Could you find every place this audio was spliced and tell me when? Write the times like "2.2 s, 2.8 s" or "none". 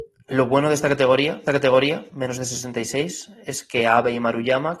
1.5 s